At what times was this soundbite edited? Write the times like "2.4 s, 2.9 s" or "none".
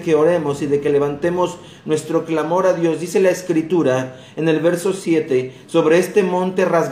none